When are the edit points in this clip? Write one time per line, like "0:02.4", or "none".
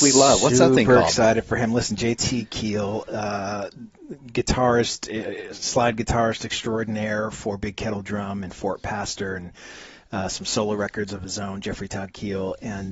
none